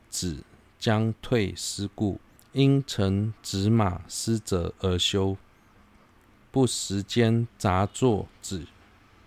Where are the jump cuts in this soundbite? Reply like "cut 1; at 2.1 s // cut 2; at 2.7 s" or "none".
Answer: cut 1; at 2.4 s // cut 2; at 3.4 s